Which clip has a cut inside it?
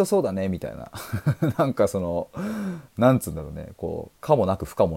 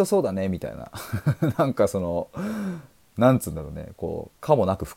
first; 1 cut; at 2.9 s

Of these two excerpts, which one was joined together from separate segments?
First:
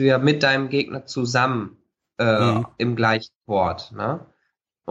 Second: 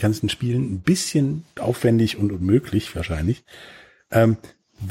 second; 1 cut; at 1.6 s

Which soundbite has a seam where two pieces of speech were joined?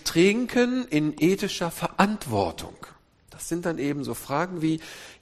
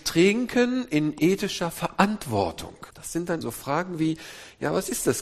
second; 2 cuts; at 2.9 s, 3.4 s

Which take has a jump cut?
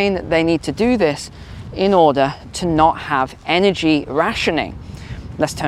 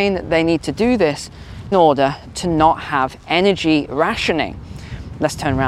second; 1 cut; at 1.7 s

